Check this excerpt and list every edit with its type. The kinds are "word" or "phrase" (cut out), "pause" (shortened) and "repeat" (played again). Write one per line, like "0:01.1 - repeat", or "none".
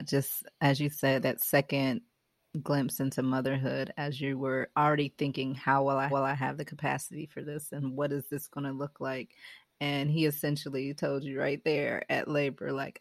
0:01.2 - word
0:06.1 - repeat